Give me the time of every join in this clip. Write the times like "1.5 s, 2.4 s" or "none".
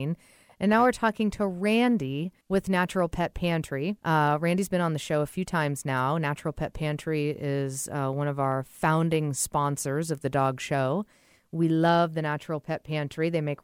2.4 s, 4.0 s